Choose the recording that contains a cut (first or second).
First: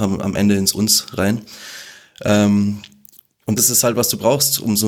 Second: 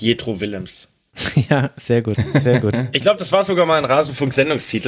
first